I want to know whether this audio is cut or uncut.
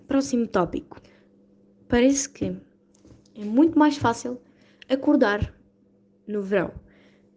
uncut